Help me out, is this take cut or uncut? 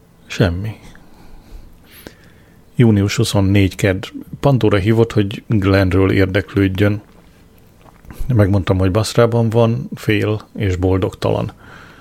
uncut